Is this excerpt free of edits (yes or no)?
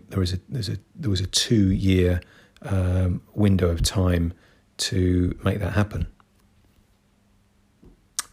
yes